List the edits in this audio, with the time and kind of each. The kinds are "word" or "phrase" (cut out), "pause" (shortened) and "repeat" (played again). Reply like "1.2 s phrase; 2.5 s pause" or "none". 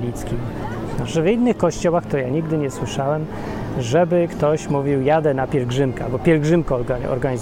none

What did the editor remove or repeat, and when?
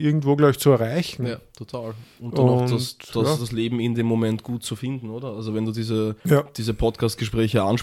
6.2 s pause

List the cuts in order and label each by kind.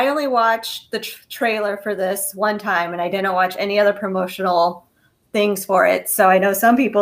none

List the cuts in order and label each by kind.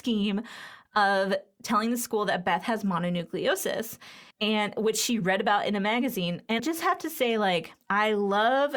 4.3 s pause; 6.6 s word; 7.8 s pause

